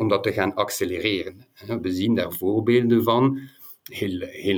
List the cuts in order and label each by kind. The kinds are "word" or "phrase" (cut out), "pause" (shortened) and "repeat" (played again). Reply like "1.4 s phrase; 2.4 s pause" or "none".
none